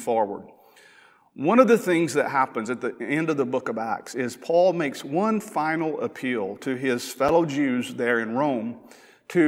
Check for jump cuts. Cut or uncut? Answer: uncut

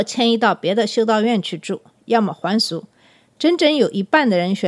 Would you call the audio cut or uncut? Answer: uncut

